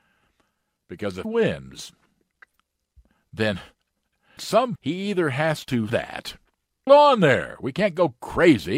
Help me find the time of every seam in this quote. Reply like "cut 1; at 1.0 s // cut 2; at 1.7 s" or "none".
cut 1; at 1.2 s // cut 2; at 4.4 s // cut 3; at 4.7 s // cut 4; at 5.9 s // cut 5; at 6.9 s